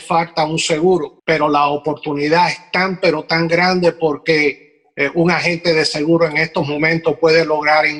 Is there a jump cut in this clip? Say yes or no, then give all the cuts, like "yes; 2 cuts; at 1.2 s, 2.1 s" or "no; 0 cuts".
yes; 1 cut; at 1.2 s